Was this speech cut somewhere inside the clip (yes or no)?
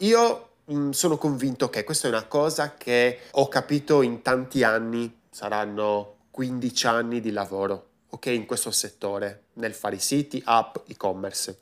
yes